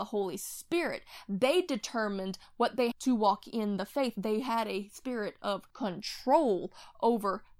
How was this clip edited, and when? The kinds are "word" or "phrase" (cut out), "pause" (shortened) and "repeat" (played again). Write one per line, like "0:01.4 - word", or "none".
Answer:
0:02.9 - phrase
0:05.7 - pause